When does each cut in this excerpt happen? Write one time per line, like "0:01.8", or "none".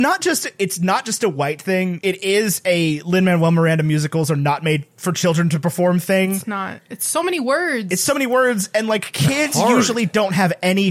none